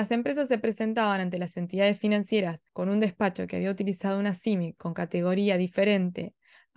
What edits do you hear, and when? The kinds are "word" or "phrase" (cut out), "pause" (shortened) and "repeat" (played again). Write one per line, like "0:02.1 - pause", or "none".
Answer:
0:02.7 - pause